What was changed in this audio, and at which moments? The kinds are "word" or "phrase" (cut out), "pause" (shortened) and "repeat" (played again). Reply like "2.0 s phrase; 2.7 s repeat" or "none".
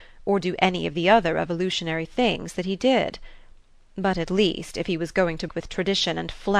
5.5 s word